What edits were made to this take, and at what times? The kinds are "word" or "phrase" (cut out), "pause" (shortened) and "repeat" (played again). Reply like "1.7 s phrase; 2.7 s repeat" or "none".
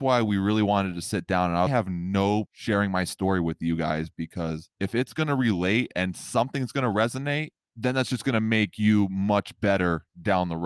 1.7 s phrase; 2.5 s word; 4.7 s pause